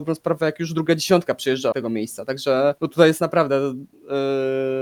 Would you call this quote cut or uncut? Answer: cut